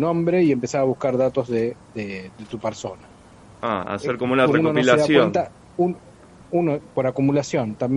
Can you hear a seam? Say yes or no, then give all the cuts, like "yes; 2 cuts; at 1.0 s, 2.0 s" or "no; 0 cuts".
no; 0 cuts